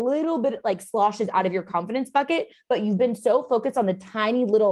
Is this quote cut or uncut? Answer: uncut